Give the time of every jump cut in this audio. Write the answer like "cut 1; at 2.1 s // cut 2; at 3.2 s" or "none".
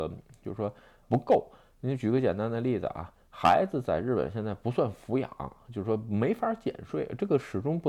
cut 1; at 1.0 s